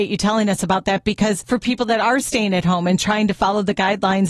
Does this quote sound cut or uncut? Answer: uncut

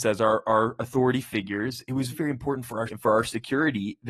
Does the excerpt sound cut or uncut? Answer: cut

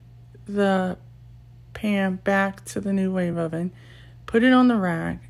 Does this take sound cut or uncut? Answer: uncut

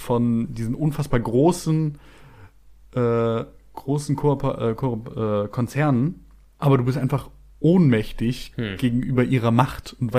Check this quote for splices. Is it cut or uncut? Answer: uncut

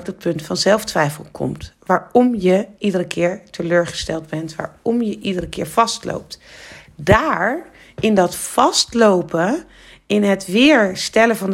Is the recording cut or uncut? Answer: uncut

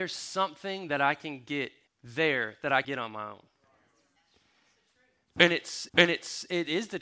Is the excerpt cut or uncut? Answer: cut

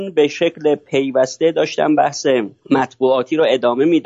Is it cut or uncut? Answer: uncut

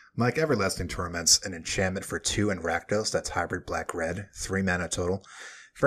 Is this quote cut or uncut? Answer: uncut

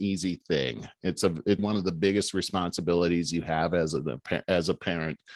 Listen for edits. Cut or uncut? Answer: cut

